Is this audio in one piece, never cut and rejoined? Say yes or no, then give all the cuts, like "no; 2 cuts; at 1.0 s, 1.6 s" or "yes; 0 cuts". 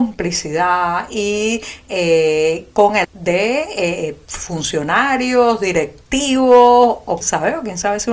no; 3 cuts; at 3.0 s, 4.3 s, 7.2 s